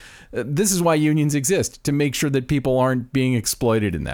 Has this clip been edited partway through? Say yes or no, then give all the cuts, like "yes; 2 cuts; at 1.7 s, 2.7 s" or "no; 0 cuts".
no; 0 cuts